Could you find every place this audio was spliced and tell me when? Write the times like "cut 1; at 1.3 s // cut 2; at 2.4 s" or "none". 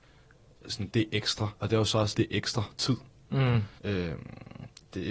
cut 1; at 0.9 s // cut 2; at 1.6 s // cut 3; at 2.1 s // cut 4; at 3.8 s